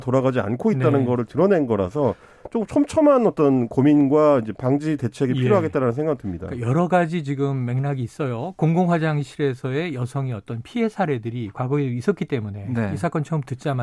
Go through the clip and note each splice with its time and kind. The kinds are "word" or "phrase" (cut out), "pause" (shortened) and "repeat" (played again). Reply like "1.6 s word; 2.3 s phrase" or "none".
none